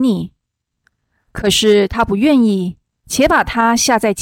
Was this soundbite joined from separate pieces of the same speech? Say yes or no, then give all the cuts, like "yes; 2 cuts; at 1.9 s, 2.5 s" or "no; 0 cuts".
yes; 1 cut; at 2.9 s